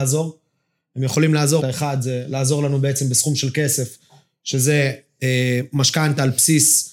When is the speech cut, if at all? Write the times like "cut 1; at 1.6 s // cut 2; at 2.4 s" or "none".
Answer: cut 1; at 1.6 s

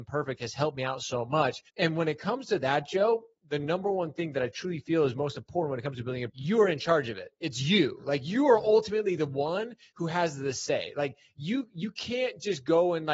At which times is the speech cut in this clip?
cut 1; at 1.7 s // cut 2; at 6.3 s

